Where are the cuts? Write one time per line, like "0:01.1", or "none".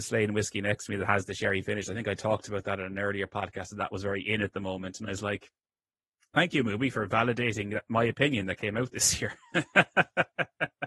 none